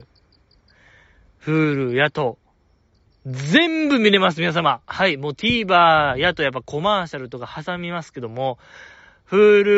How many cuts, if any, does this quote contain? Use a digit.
1